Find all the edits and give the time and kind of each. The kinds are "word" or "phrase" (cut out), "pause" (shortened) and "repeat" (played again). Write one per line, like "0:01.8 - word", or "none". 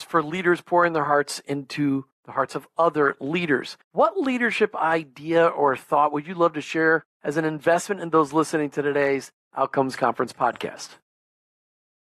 0:03.8 - pause